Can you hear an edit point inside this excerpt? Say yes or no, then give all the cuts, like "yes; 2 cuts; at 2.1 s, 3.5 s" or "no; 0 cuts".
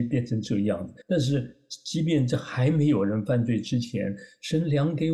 yes; 1 cut; at 1.0 s